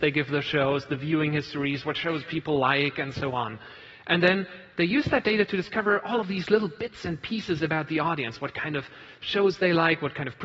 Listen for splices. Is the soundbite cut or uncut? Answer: uncut